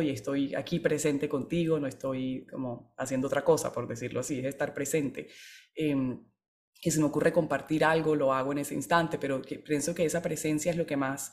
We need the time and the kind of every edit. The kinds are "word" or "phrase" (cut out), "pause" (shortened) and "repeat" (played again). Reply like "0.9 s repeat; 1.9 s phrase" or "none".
none